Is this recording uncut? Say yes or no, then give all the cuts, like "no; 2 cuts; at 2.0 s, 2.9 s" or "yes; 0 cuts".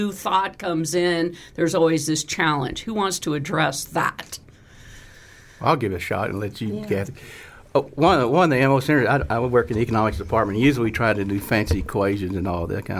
yes; 0 cuts